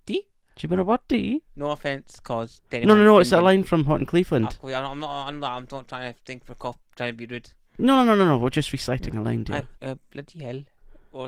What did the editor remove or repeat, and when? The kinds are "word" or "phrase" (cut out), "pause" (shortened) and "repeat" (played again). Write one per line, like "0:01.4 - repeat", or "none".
0:01.5 - pause
0:02.7 - pause
0:09.8 - pause